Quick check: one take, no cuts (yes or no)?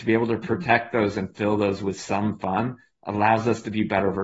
yes